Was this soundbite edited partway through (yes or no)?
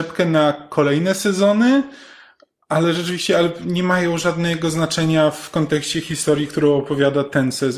no